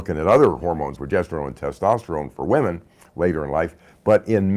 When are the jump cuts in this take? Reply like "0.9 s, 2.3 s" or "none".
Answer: 1.0 s